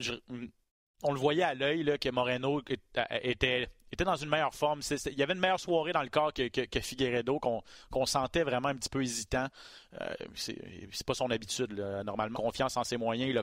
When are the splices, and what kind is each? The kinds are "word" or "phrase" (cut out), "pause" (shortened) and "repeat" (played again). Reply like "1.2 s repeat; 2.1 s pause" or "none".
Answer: 12.3 s phrase